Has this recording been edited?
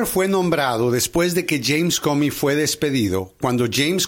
no; 0 cuts

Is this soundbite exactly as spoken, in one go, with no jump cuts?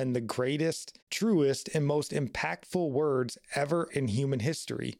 no; 2 cuts; at 1.0 s, 3.9 s

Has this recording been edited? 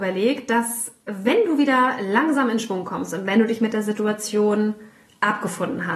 no; 0 cuts

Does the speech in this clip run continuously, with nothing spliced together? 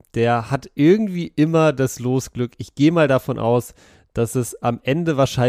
yes; 0 cuts

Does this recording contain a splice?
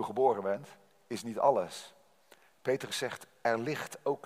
no; 0 cuts

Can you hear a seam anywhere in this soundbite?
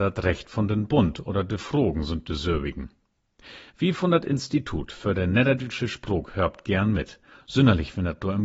no; 0 cuts

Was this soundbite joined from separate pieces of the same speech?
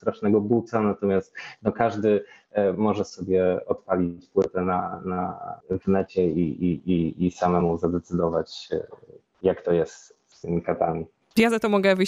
yes; 1 cut; at 5.6 s

